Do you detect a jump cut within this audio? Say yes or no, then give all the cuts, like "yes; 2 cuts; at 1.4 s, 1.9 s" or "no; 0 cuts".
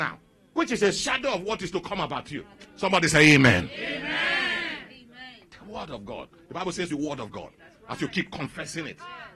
yes; 1 cut; at 6.9 s